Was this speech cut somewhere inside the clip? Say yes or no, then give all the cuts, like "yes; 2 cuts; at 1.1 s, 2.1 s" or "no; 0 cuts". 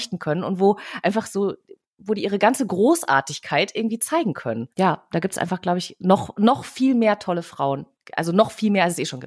yes; 1 cut; at 4.7 s